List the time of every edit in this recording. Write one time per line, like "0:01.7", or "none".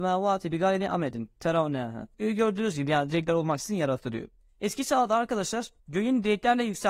0:02.1
0:04.5
0:05.8